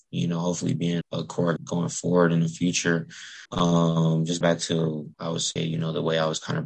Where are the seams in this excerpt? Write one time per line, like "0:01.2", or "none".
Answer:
0:01.0
0:01.6
0:03.5
0:04.4
0:05.1
0:05.6

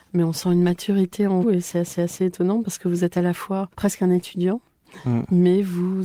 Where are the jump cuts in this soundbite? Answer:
0:01.4
0:02.0
0:03.7

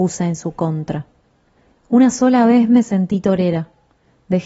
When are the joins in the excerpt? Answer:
none

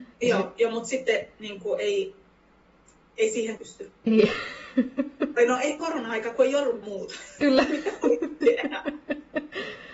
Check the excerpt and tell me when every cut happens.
0:03.6
0:04.1
0:05.8
0:06.8

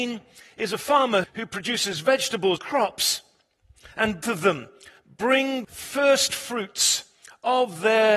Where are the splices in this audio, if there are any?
0:01.2
0:02.6
0:04.2
0:05.6

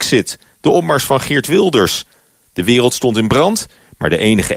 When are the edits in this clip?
none

